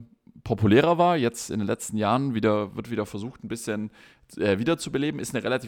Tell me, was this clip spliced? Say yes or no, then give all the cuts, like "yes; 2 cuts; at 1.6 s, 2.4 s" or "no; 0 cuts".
no; 0 cuts